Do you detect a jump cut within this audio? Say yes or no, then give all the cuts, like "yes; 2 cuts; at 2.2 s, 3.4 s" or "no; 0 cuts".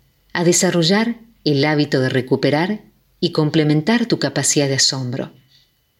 no; 0 cuts